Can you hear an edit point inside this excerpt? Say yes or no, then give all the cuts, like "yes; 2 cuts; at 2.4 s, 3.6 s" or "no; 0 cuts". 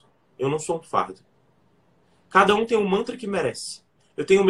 no; 0 cuts